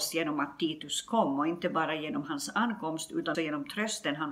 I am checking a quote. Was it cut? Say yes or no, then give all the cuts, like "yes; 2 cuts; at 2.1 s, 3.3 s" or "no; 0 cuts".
yes; 1 cut; at 3.3 s